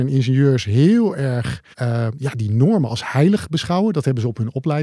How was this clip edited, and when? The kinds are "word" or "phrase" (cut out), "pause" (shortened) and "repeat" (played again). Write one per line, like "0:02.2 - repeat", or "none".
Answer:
0:01.7 - pause